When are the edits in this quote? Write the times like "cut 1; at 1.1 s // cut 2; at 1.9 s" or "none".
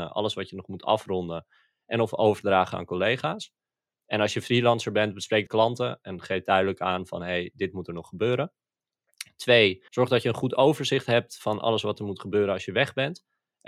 cut 1; at 5.5 s // cut 2; at 9.9 s